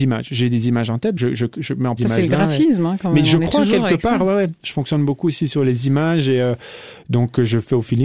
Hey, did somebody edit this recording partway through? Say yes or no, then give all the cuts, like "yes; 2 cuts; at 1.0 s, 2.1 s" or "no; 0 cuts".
yes; 2 cuts; at 1.2 s, 2.0 s